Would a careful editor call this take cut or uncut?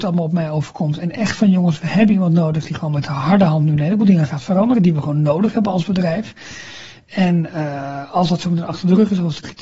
uncut